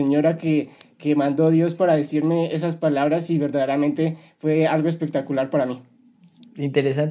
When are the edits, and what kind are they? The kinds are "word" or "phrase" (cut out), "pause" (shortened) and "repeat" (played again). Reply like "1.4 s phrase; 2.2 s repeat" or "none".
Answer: 6.1 s pause